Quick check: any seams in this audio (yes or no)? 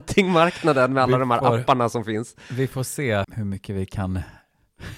yes